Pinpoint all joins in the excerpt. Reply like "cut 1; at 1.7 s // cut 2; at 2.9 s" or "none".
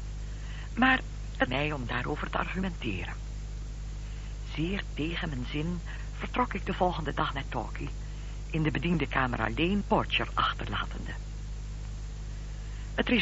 cut 1; at 1.5 s // cut 2; at 9.8 s